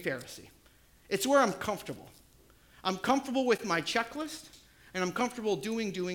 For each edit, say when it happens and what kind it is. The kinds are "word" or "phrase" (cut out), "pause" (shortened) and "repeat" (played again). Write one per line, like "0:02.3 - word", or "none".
none